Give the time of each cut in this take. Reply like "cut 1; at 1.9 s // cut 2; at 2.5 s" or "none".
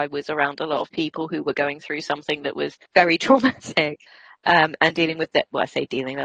cut 1; at 2.9 s // cut 2; at 4.1 s